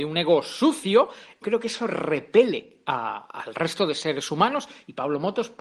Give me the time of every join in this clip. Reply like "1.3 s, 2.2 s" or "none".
1.4 s